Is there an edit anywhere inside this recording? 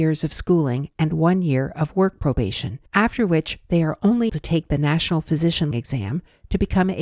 yes; 3 cuts; at 2.9 s, 4.3 s, 5.7 s

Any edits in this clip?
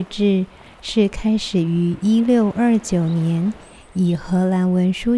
no; 0 cuts

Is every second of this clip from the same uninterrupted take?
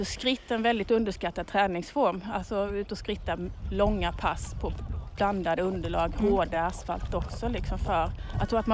yes; 0 cuts

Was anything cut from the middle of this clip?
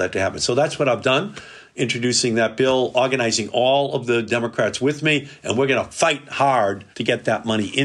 yes; 1 cut; at 6.9 s

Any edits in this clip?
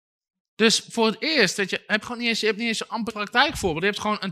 yes; 2 cuts; at 2.0 s, 3.1 s

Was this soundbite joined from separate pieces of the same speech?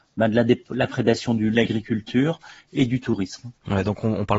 yes; 1 cut; at 1.5 s

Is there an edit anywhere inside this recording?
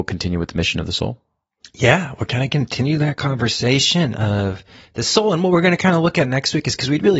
no; 0 cuts

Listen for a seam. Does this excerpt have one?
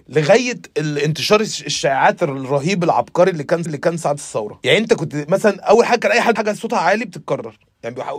yes; 2 cuts; at 3.7 s, 6.4 s

